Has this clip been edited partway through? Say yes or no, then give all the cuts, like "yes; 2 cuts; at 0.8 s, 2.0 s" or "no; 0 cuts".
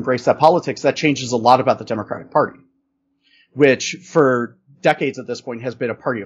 no; 0 cuts